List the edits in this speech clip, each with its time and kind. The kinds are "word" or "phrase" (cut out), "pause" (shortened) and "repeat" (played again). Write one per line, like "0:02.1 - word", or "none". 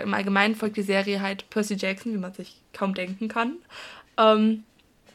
none